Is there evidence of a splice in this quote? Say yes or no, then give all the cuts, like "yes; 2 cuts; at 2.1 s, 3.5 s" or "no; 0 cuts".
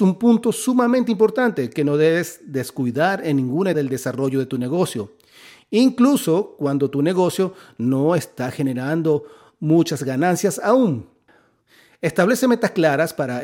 yes; 1 cut; at 3.7 s